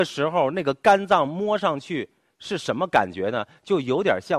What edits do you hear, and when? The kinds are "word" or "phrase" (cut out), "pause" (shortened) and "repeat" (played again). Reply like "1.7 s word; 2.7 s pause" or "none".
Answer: none